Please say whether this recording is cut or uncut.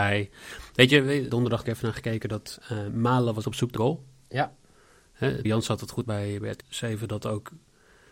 cut